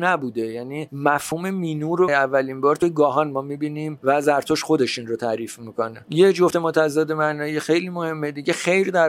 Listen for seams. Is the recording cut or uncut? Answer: cut